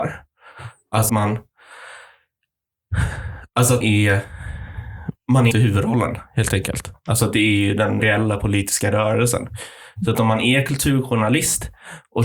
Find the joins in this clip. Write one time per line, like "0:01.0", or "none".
0:01.1
0:03.8
0:05.5
0:08.0